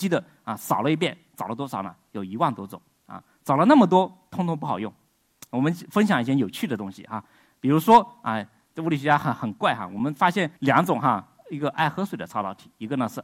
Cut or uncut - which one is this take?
cut